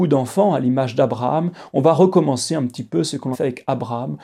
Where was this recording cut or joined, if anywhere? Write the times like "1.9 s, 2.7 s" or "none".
3.3 s